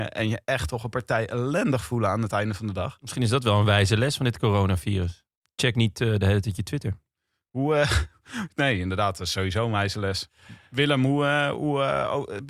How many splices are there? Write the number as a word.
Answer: zero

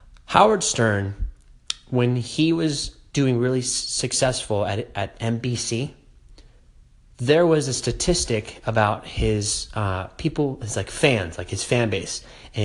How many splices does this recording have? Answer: zero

